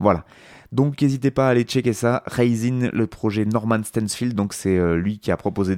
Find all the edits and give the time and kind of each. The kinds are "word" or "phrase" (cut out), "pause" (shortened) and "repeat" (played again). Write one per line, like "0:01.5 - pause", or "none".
none